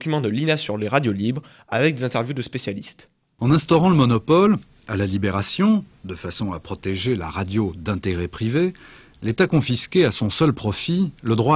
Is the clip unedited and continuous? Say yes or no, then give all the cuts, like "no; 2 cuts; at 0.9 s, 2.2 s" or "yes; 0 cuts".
yes; 0 cuts